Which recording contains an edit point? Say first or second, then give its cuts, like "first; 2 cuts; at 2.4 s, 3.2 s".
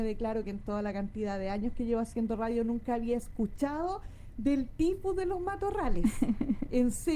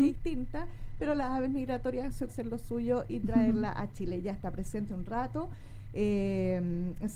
second; 2 cuts; at 2.3 s, 4.9 s